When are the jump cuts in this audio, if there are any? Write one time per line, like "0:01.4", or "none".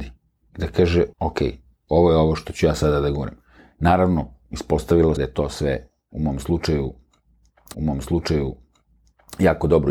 0:01.1
0:03.6
0:05.2
0:07.7